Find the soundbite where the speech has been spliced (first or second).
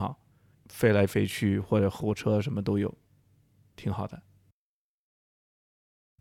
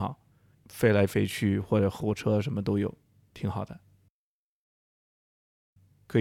second